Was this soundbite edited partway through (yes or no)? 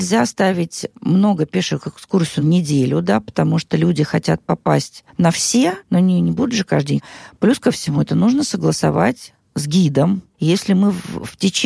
yes